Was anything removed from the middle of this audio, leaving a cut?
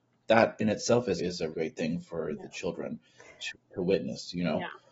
yes; 3 cuts; at 1.2 s, 1.5 s, 3.5 s

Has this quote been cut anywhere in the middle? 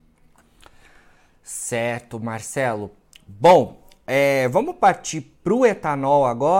no; 0 cuts

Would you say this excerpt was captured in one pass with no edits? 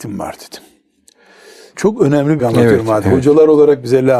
no; 1 cut; at 2.4 s

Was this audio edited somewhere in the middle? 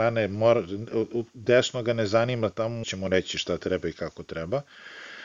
yes; 1 cut; at 2.8 s

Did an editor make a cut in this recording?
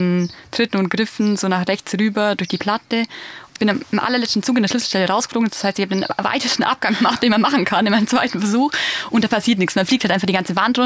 yes; 1 cut; at 3.5 s

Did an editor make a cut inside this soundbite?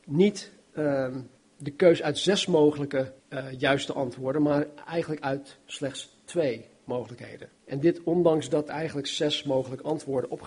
yes; 4 cuts; at 1.4 s, 3.2 s, 7.5 s, 8.7 s

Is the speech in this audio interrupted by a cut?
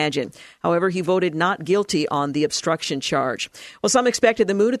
no; 0 cuts

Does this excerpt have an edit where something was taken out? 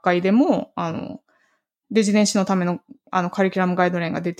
no; 0 cuts

